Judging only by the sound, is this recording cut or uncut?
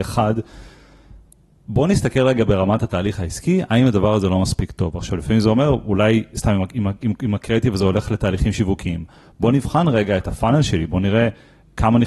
uncut